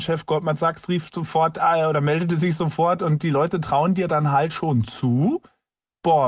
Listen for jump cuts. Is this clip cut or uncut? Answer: uncut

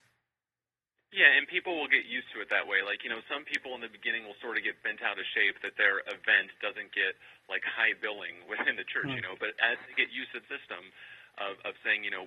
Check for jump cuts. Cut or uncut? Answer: cut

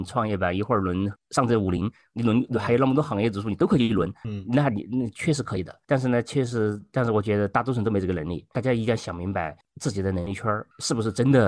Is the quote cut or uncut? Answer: cut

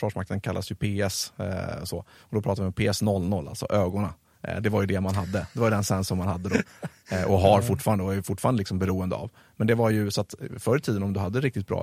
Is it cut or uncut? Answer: uncut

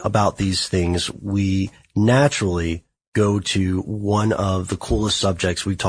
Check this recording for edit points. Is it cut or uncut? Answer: uncut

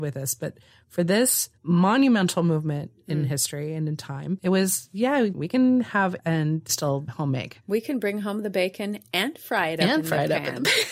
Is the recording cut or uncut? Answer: cut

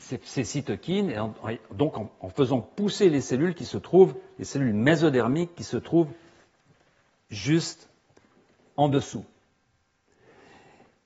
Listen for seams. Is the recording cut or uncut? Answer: uncut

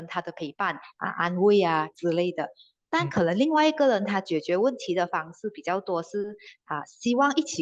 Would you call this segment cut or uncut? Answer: uncut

